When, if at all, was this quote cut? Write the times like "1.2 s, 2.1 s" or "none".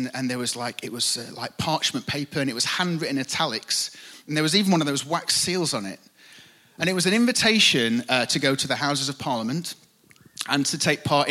none